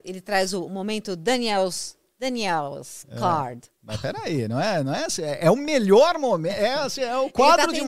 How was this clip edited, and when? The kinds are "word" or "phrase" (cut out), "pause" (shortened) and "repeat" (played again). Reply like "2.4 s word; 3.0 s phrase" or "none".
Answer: none